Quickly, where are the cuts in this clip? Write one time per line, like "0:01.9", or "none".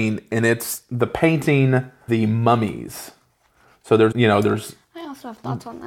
0:02.1
0:04.1